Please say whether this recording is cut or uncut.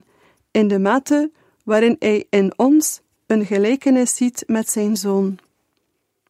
uncut